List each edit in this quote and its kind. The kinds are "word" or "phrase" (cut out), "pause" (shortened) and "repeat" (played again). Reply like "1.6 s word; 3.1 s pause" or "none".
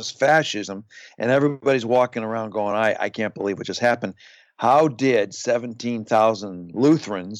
none